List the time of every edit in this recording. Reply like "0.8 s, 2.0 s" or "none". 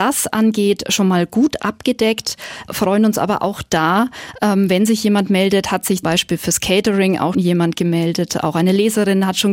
2.7 s, 6.0 s, 7.3 s

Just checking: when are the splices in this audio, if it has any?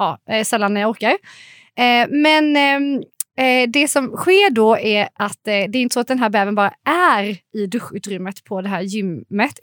none

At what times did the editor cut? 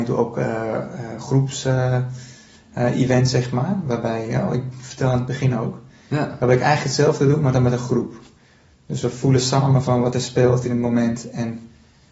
none

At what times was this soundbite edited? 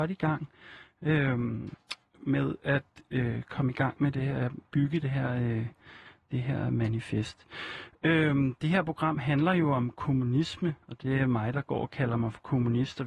10.8 s

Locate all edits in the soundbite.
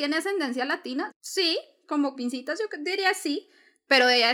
1.1 s, 2.1 s

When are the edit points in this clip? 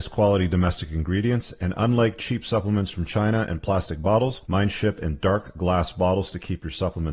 4.4 s

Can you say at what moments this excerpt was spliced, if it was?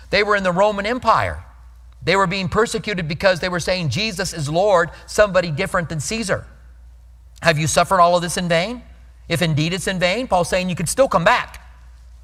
none

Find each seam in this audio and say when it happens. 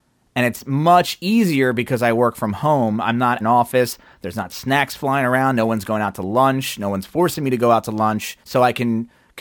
3.4 s, 8.4 s

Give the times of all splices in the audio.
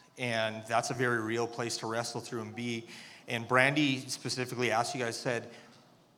none

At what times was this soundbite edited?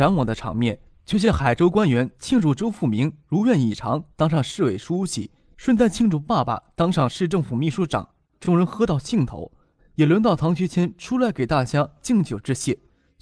8.3 s

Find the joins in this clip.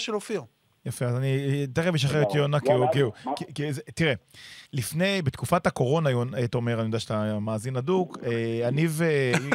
4.7 s

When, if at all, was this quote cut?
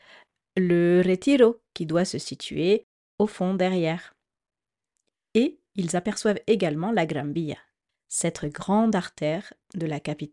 none

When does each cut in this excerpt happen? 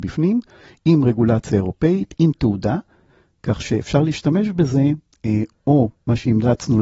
none

